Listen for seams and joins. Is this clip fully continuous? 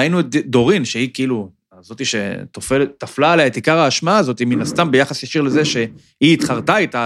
yes; 0 cuts

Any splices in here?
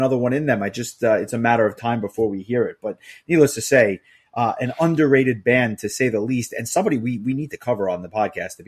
no; 0 cuts

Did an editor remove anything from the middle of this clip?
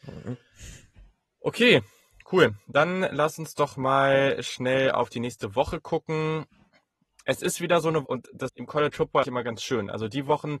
yes; 3 cuts; at 8.0 s, 8.5 s, 9.2 s

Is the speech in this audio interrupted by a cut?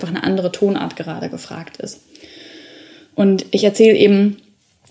no; 0 cuts

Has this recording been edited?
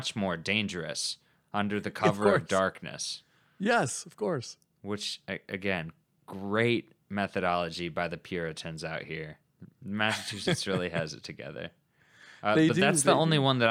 no; 0 cuts

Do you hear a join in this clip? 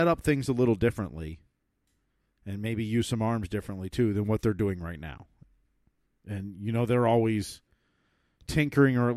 no; 0 cuts

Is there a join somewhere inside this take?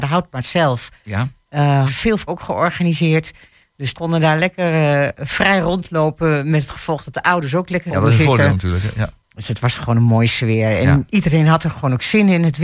yes; 4 cuts; at 1.9 s, 2.3 s, 3.9 s, 7.9 s

